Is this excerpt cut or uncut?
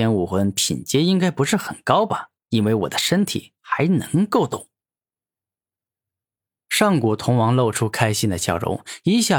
cut